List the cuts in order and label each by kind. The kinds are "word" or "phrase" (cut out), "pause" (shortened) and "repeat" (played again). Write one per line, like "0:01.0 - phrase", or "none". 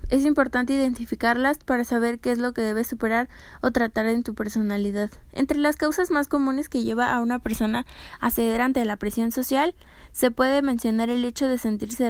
none

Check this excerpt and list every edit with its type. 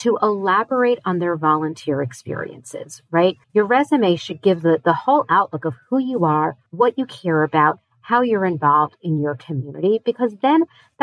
0:03.4 - pause
0:06.7 - pause

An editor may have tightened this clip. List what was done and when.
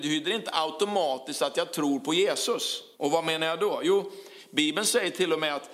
0:02.9 - pause

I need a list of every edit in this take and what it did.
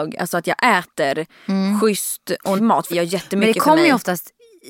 0:02.6 - word
0:02.9 - word

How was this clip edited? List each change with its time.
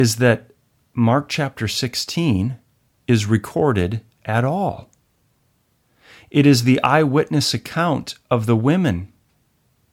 none

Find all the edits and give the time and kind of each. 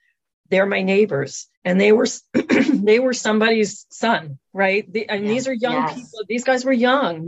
0:01.5 - pause
0:04.5 - pause

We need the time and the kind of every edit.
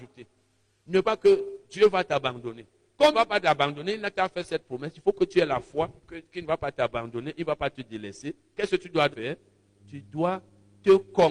0:01.0 - word
0:03.1 - phrase
0:06.0 - pause
0:09.1 - word

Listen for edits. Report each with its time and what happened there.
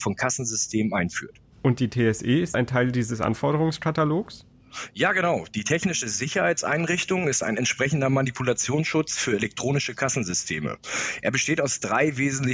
0:01.5 - pause

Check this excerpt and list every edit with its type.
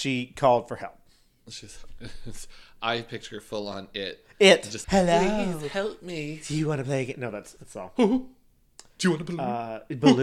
0:04.8 - word
0:07.6 - phrase

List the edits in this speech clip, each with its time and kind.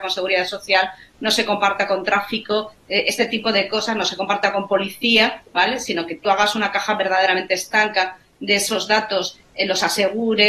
none

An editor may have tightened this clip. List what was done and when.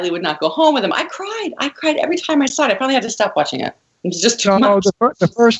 none

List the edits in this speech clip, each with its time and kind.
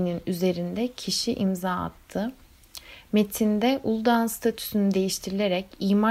none

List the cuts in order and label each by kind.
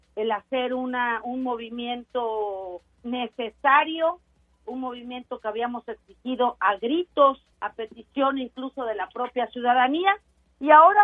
0:02.9 - pause
0:07.5 - pause

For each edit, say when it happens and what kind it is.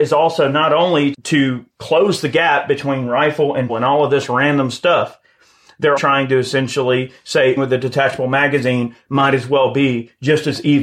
0:01.1 - word
0:03.7 - word
0:06.0 - word
0:07.6 - word

